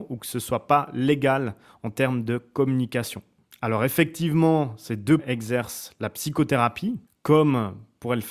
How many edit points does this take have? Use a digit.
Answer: 1